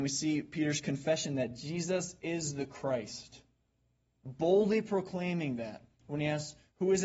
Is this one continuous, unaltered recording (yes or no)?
yes